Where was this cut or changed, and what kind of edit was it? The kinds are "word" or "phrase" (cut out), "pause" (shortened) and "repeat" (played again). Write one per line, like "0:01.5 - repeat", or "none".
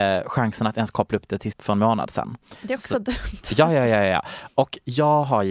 0:01.5 - phrase